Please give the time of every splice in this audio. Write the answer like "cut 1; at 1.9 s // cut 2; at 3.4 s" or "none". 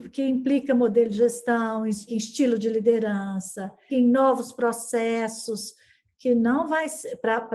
cut 1; at 2.1 s // cut 2; at 3.9 s